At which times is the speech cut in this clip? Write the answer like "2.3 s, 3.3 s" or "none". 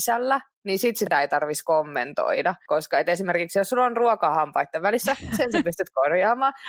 none